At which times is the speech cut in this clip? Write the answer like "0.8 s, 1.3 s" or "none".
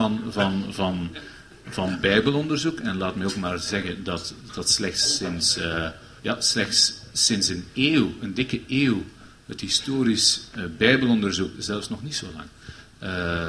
6.2 s

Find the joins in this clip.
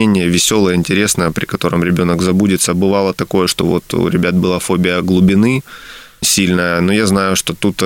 6.2 s

